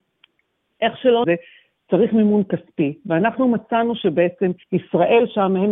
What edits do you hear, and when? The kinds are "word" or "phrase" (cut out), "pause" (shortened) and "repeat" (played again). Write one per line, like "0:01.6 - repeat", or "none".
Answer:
0:01.2 - phrase
0:04.6 - pause